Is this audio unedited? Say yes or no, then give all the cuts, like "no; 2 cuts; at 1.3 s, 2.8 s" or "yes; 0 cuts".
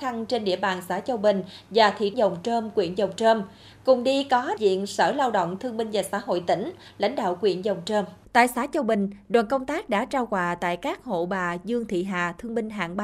no; 3 cuts; at 2.1 s, 4.6 s, 8.2 s